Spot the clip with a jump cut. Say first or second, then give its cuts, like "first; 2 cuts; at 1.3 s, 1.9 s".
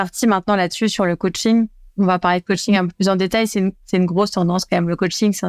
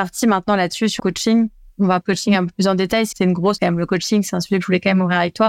second; 4 cuts; at 1.0 s, 2.0 s, 3.1 s, 3.6 s